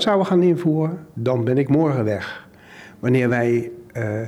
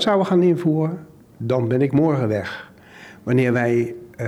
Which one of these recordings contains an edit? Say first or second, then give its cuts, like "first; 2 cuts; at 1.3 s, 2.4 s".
first; 1 cut; at 1.1 s